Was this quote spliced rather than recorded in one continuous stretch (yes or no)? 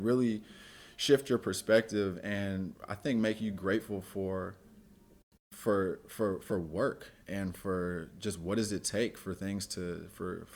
no